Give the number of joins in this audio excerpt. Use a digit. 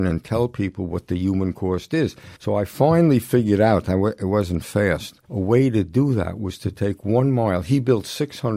2